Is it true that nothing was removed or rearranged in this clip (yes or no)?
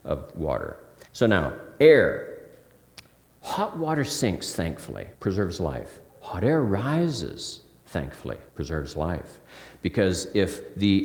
no